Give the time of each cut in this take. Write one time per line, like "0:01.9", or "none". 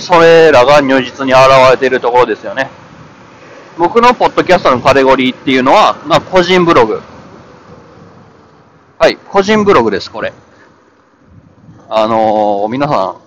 none